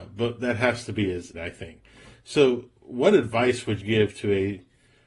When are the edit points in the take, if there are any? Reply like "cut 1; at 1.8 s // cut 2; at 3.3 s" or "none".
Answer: cut 1; at 1.3 s // cut 2; at 2.8 s // cut 3; at 3.8 s